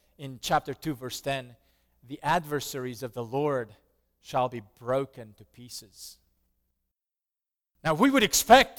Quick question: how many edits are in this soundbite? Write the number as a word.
zero